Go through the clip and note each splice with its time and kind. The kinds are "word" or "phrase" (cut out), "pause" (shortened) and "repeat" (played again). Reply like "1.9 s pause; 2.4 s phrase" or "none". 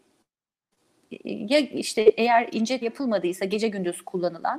2.8 s word